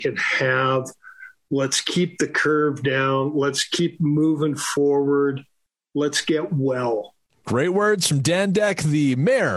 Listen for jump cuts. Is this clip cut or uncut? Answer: uncut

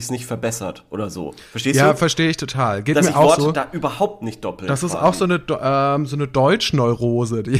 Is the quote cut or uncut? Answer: uncut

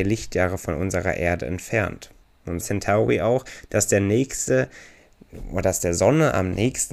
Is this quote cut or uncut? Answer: cut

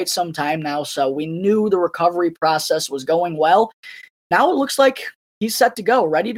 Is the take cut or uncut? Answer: uncut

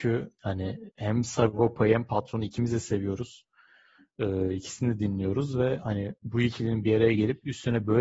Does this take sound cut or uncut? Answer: cut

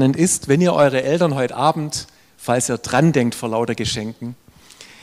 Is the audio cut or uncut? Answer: uncut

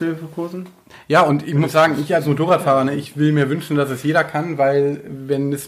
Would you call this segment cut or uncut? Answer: uncut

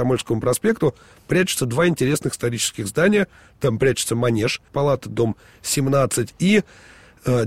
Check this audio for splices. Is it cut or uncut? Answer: cut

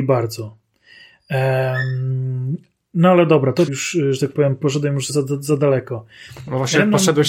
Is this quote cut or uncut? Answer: cut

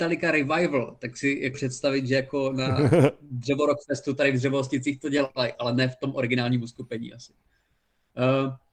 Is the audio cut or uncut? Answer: cut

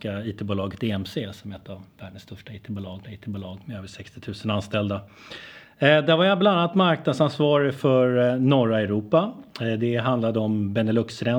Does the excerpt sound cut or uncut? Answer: cut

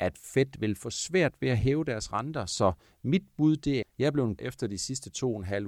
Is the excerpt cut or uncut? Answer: cut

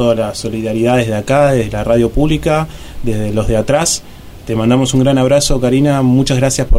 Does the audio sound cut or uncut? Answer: uncut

